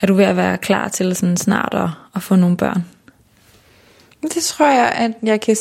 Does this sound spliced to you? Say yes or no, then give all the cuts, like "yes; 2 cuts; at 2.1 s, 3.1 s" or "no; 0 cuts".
no; 0 cuts